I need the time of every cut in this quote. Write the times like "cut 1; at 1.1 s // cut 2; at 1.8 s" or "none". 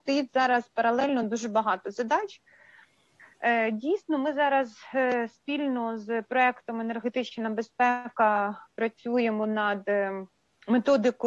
none